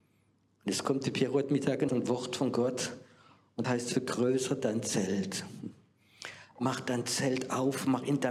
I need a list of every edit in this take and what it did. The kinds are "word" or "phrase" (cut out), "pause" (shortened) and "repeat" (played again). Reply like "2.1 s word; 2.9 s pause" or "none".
1.9 s word; 3.6 s word